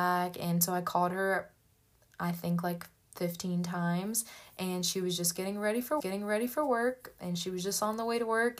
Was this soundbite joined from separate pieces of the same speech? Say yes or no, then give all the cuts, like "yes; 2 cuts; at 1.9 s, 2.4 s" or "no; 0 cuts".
yes; 1 cut; at 6.0 s